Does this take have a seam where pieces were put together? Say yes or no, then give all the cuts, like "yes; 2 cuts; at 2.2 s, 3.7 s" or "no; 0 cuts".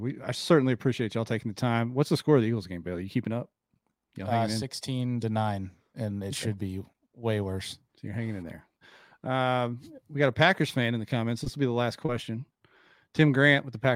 yes; 1 cut; at 7.9 s